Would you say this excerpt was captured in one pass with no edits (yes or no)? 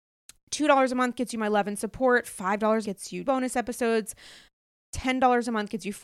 no